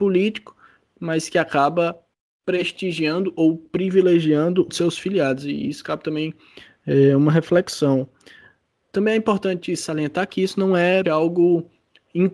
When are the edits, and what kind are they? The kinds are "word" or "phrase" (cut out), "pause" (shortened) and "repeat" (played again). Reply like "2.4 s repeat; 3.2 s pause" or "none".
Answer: 2.1 s pause; 4.7 s word; 11.0 s word